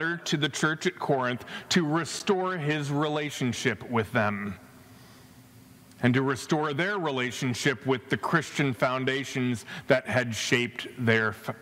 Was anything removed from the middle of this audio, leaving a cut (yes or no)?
no